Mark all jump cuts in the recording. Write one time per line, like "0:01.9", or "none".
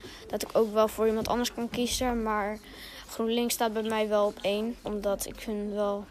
0:04.8